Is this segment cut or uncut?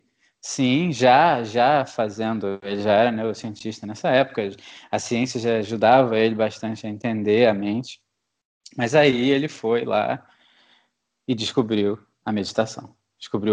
uncut